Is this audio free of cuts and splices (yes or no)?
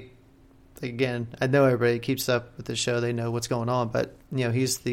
yes